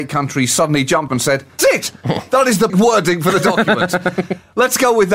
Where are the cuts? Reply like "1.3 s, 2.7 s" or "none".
1.1 s, 1.6 s, 2.7 s